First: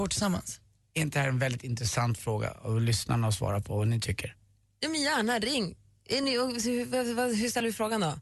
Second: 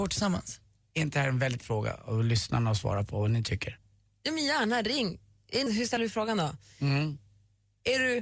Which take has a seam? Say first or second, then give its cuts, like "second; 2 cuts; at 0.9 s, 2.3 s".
second; 2 cuts; at 1.6 s, 5.7 s